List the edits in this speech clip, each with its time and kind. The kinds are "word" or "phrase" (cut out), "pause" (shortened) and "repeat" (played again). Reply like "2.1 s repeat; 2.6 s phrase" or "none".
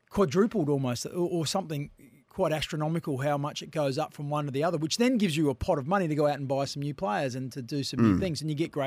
none